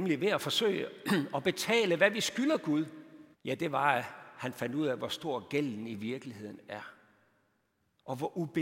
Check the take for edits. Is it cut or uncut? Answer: cut